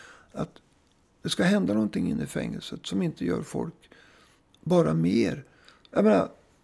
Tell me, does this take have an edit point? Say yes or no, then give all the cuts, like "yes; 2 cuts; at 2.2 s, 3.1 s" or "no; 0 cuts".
no; 0 cuts